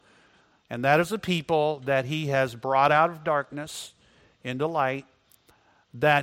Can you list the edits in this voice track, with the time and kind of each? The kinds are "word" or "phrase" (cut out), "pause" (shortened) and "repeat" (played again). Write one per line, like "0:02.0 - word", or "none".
none